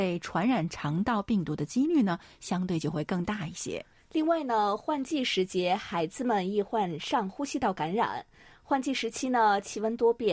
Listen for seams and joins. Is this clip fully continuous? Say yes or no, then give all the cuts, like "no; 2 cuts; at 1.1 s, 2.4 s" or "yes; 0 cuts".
no; 1 cut; at 4.0 s